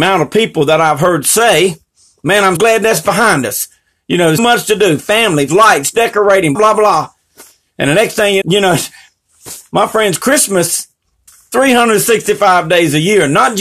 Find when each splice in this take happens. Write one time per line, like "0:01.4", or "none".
0:02.6
0:04.4
0:05.5
0:06.5
0:08.4
0:11.3